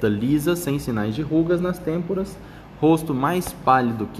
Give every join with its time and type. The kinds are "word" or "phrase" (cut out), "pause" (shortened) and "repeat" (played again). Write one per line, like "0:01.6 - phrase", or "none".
none